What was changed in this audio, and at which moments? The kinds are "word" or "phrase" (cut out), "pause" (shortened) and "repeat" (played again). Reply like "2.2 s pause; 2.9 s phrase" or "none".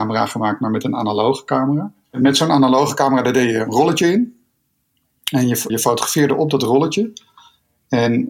5.7 s word